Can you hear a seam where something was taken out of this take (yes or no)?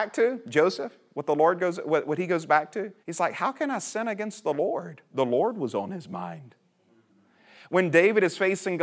yes